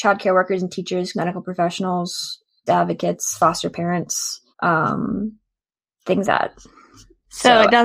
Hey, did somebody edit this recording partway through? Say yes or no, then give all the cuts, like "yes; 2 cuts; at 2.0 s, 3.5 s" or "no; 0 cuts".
yes; 4 cuts; at 1.1 s, 2.7 s, 4.5 s, 6.2 s